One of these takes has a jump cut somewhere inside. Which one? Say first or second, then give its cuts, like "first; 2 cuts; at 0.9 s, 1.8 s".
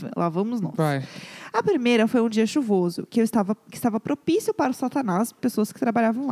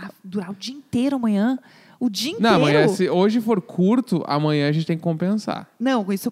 first; 1 cut; at 5.4 s